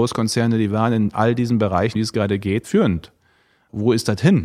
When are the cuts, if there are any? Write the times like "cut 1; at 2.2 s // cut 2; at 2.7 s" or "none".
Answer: cut 1; at 1.9 s // cut 2; at 2.6 s